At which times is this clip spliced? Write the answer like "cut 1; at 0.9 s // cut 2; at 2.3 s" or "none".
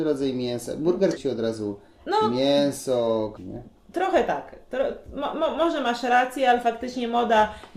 cut 1; at 1.2 s // cut 2; at 3.4 s